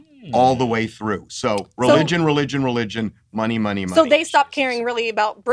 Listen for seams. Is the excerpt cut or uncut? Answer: uncut